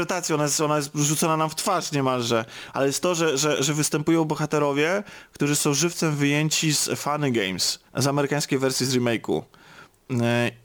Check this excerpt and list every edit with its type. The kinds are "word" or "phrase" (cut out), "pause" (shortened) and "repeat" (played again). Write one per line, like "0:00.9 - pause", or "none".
0:07.9 - pause